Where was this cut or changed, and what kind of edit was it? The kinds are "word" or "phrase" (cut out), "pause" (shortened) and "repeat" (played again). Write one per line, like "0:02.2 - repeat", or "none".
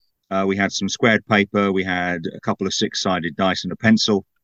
none

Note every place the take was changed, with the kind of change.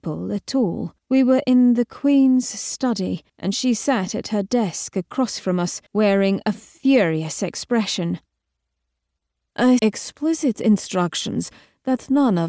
0:01.0 - pause
0:03.3 - pause
0:05.9 - pause
0:09.8 - phrase

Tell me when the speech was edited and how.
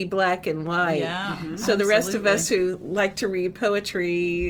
none

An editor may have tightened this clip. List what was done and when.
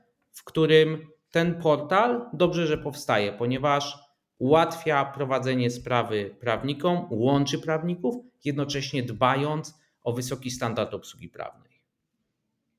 none

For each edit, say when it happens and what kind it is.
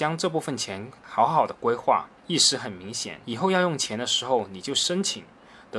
0:02.2 - pause
0:03.2 - pause

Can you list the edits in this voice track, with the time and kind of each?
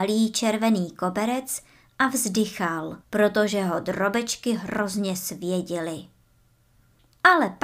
0:03.0 - pause

